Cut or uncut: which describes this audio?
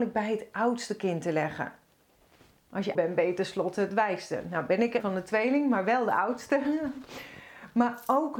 cut